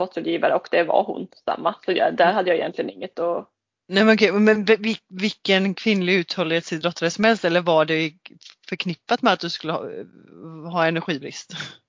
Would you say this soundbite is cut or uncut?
uncut